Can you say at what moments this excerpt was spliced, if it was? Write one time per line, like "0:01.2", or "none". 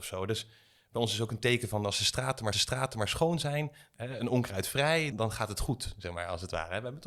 0:02.5
0:05.1